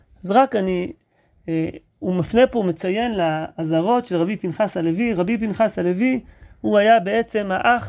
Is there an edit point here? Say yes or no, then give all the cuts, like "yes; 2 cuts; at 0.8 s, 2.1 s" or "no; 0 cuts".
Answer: no; 0 cuts